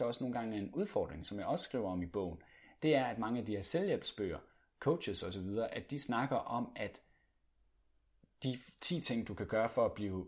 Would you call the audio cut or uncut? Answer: uncut